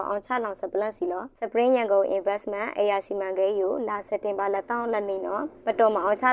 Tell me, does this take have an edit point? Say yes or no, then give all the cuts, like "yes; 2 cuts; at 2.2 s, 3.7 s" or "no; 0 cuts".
no; 0 cuts